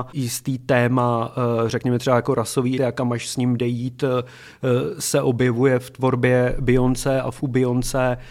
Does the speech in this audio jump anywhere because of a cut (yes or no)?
yes